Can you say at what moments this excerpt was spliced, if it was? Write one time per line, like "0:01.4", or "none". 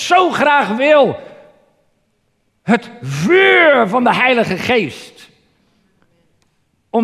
none